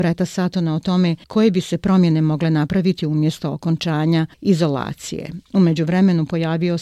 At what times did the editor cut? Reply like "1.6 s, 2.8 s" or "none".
1.2 s, 4.3 s